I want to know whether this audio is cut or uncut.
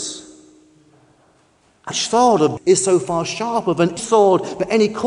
cut